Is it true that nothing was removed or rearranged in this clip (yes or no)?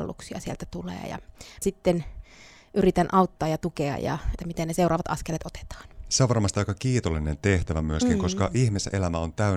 no